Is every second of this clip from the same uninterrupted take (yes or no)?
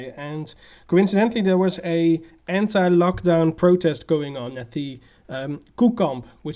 yes